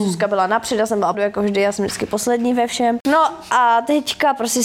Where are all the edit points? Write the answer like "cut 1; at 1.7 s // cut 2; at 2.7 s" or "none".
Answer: cut 1; at 1.1 s

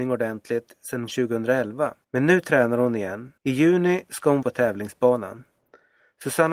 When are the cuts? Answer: cut 1; at 1.1 s // cut 2; at 2.0 s // cut 3; at 3.4 s // cut 4; at 4.4 s

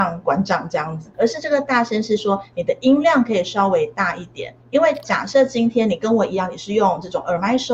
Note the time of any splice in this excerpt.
cut 1; at 1.1 s // cut 2; at 4.6 s

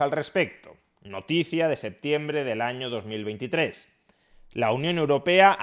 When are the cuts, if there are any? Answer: none

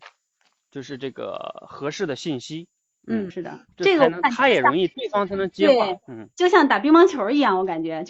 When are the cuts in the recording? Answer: cut 1; at 3.3 s // cut 2; at 3.7 s // cut 3; at 6.3 s

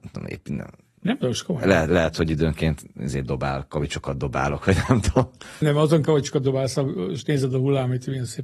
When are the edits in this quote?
cut 1; at 5.6 s // cut 2; at 6.1 s

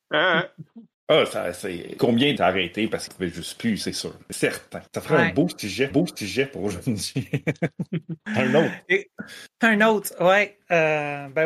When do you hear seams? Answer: cut 1; at 2.4 s // cut 2; at 3.1 s // cut 3; at 4.9 s // cut 4; at 5.9 s

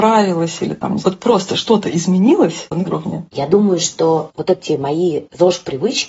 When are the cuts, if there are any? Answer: cut 1; at 1.0 s // cut 2; at 2.8 s

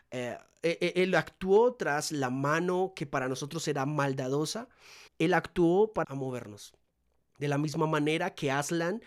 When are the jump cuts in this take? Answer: cut 1; at 5.1 s // cut 2; at 6.0 s

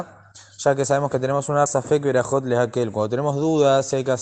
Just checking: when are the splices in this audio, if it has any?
cut 1; at 1.7 s

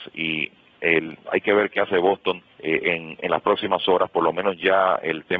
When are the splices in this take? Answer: cut 1; at 2.5 s

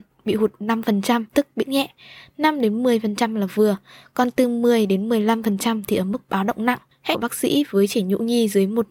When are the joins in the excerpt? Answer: cut 1; at 1.3 s // cut 2; at 1.6 s // cut 3; at 7.1 s

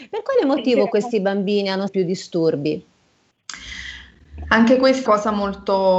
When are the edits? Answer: cut 1; at 1.9 s // cut 2; at 5.0 s

